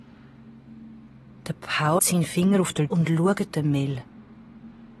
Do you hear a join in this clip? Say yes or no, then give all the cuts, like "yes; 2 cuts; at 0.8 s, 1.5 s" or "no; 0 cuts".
yes; 3 cuts; at 2.0 s, 2.9 s, 3.5 s